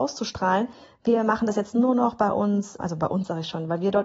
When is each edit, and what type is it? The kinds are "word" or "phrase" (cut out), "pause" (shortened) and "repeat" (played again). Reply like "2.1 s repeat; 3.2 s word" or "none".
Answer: 2.8 s word

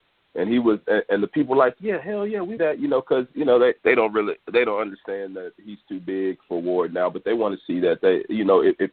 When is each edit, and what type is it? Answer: 2.6 s phrase; 3.8 s pause

